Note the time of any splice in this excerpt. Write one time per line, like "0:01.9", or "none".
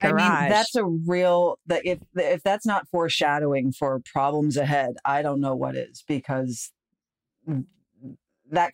none